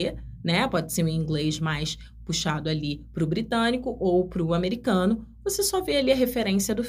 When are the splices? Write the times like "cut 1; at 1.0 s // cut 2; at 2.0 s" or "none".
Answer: none